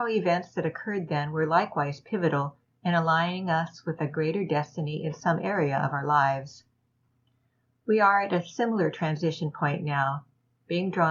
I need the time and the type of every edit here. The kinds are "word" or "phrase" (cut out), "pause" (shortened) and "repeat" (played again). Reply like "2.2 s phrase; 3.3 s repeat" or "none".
none